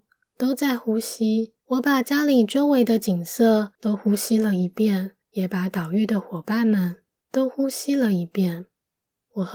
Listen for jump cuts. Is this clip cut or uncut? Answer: cut